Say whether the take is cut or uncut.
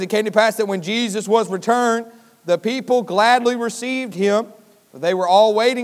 uncut